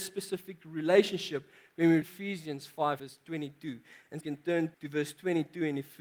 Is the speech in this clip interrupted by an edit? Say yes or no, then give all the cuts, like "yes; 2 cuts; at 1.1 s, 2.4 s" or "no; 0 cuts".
yes; 4 cuts; at 2.0 s, 3.0 s, 4.2 s, 4.7 s